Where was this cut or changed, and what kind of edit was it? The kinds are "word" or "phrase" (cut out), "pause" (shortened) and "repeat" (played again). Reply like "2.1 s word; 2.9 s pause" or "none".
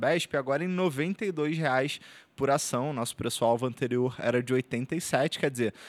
none